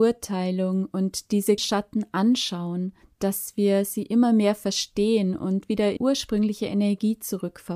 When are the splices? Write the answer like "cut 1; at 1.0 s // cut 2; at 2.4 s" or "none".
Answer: cut 1; at 1.6 s // cut 2; at 3.0 s // cut 3; at 6.0 s